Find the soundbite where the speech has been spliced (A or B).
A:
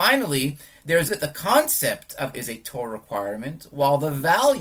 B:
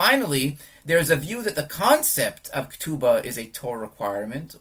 A